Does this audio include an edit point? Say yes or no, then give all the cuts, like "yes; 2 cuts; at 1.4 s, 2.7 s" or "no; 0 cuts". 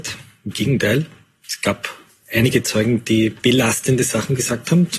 no; 0 cuts